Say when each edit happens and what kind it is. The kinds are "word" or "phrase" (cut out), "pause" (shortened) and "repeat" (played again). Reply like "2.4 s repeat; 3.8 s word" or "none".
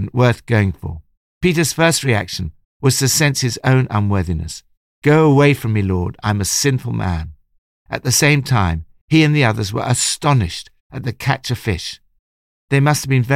none